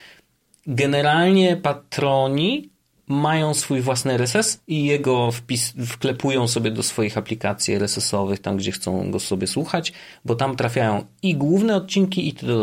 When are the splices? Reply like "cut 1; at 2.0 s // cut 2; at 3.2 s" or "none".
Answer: cut 1; at 4.6 s